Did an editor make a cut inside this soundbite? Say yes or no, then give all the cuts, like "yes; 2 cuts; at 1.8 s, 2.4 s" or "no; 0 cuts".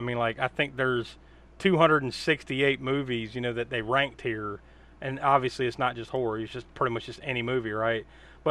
no; 0 cuts